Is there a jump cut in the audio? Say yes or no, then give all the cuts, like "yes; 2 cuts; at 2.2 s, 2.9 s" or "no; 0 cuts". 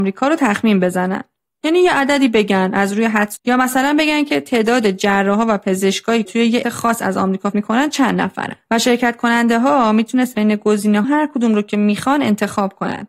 yes; 6 cuts; at 3.4 s, 6.2 s, 6.6 s, 7.5 s, 10.3 s, 11.0 s